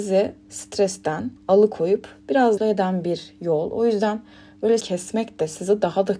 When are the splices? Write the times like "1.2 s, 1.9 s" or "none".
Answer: 1.4 s, 2.6 s, 4.8 s